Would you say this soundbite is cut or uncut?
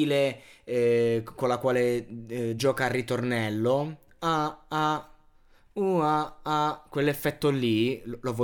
cut